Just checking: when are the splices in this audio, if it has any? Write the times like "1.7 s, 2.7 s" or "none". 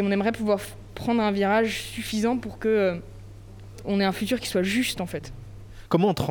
3.8 s